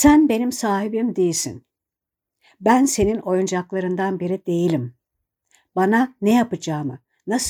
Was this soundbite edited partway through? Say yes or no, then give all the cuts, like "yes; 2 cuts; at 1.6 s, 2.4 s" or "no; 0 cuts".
no; 0 cuts